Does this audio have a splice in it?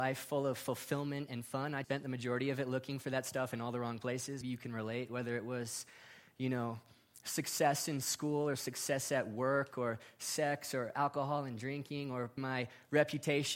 yes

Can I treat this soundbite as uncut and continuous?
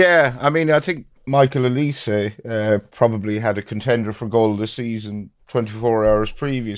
no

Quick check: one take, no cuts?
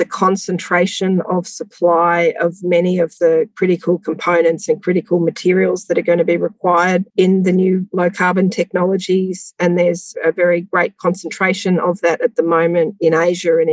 no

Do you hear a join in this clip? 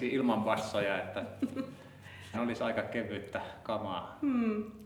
yes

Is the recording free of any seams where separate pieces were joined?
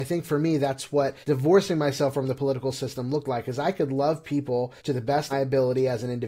no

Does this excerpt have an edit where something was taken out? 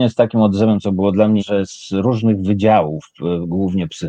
yes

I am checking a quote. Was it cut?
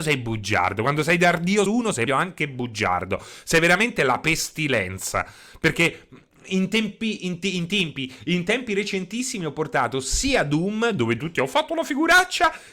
yes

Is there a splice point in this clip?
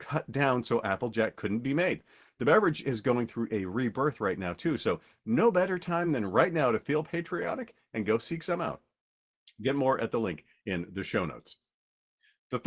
no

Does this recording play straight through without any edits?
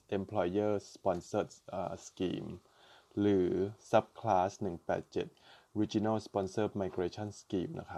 yes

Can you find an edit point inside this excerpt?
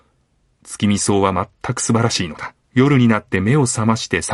yes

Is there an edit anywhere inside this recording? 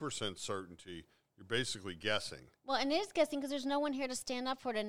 no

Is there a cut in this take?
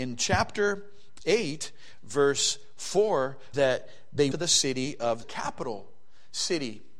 yes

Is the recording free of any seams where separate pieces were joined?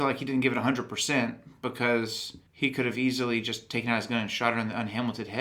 no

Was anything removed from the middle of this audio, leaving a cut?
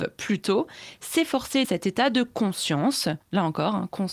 yes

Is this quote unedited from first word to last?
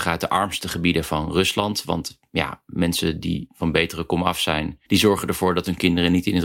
no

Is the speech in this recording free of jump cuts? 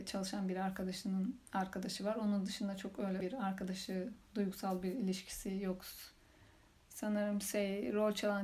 no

